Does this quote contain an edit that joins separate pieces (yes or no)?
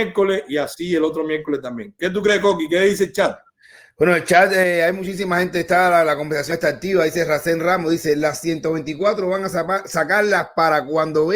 no